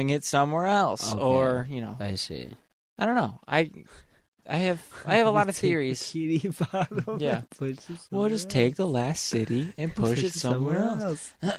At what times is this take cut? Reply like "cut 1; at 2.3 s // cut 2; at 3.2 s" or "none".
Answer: none